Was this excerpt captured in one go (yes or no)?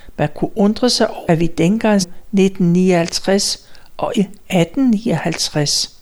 no